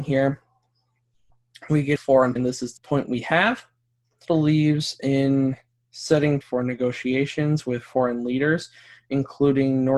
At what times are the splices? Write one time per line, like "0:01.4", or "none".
0:02.0
0:02.4
0:02.8
0:04.2
0:06.4